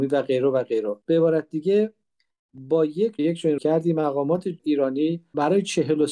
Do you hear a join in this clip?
yes; 3 cuts; at 1.0 s, 3.2 s, 3.6 s

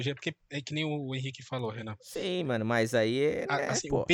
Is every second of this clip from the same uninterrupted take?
yes; 0 cuts

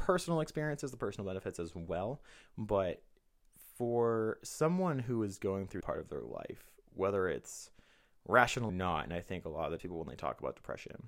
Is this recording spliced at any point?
yes; 3 cuts; at 5.8 s, 8.7 s, 9.8 s

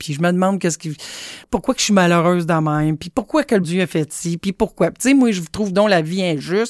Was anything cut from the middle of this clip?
yes; 2 cuts; at 1.4 s, 3.6 s

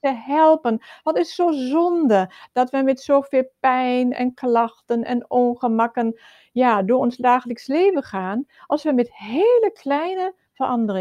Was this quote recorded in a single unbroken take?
yes; 0 cuts

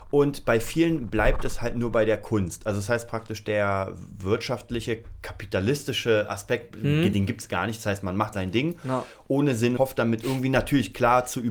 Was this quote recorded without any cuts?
no; 2 cuts; at 8.3 s, 9.8 s

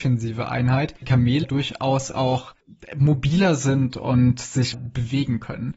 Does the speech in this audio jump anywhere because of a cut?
yes; 3 cuts; at 1.0 s, 1.4 s, 4.7 s

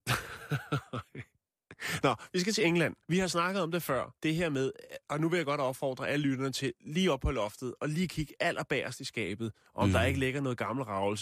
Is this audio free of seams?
no; 2 cuts; at 3.0 s, 4.2 s

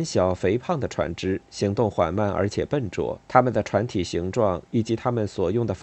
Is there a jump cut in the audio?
yes; 1 cut; at 3.2 s

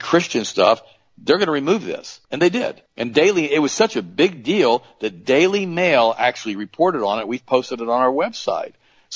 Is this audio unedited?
no; 2 cuts; at 2.2 s, 2.9 s

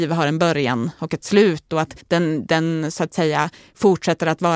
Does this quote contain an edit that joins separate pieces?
yes; 1 cut; at 2.0 s

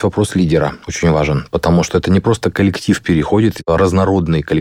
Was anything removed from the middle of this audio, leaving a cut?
no; 0 cuts

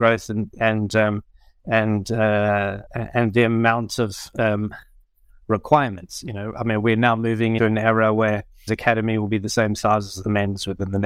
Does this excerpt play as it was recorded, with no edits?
no; 3 cuts; at 2.9 s, 7.6 s, 8.7 s

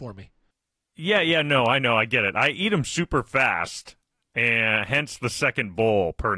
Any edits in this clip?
no; 0 cuts

